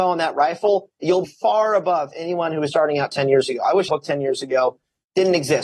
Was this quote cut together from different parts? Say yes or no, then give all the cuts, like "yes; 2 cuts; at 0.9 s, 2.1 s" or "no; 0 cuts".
yes; 3 cuts; at 1.2 s, 2.7 s, 3.9 s